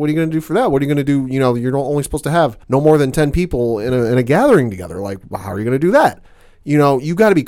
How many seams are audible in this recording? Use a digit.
1